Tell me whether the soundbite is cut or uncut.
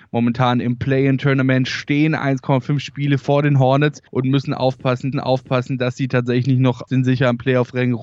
cut